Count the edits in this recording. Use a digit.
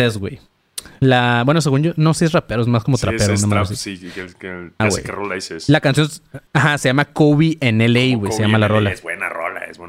2